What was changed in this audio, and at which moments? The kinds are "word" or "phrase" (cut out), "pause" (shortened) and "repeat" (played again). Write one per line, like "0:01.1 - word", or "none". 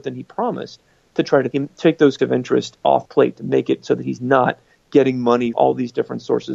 0:01.5 - word
0:02.2 - word
0:03.0 - word
0:05.5 - word